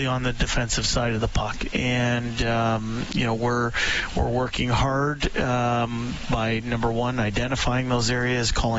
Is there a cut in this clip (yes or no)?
no